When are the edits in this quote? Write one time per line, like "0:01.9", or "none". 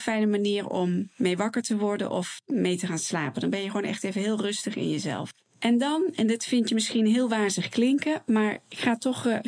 none